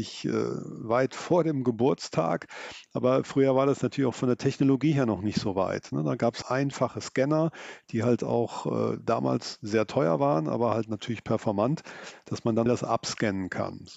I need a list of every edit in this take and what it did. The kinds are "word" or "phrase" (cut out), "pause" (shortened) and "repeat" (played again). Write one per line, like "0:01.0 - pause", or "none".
0:06.4 - word
0:12.7 - phrase